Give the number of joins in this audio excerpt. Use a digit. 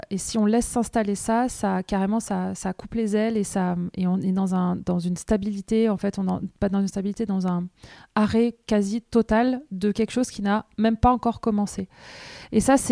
0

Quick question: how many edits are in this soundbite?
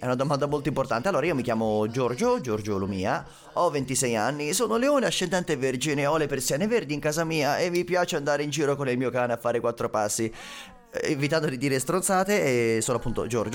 0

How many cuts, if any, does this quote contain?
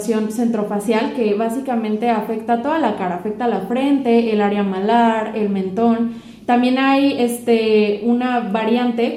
0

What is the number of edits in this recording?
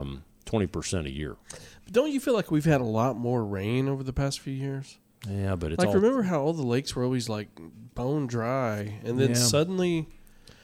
0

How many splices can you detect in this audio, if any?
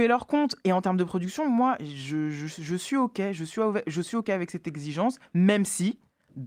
0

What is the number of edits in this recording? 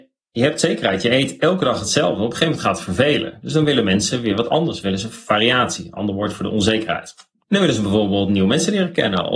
1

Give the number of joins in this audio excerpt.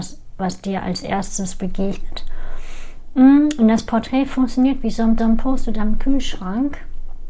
1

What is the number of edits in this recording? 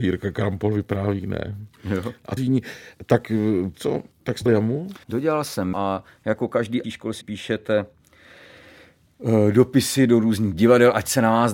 8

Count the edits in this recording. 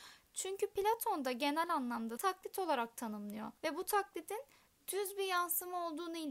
2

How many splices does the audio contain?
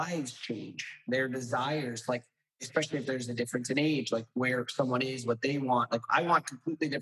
0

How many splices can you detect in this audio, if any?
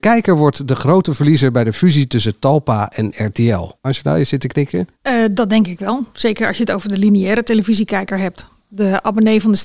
2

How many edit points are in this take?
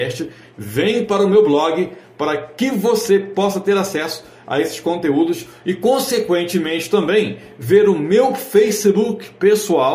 0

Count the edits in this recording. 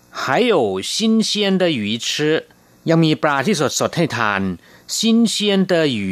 0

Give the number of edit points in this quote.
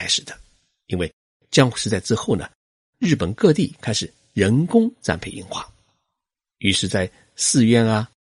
0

